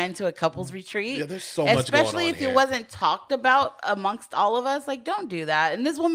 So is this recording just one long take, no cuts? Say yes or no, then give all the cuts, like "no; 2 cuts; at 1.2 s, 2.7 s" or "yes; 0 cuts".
yes; 0 cuts